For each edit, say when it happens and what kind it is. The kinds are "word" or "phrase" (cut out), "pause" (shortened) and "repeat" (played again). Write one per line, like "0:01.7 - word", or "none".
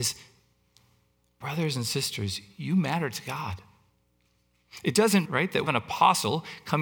0:05.2 - word
0:05.7 - phrase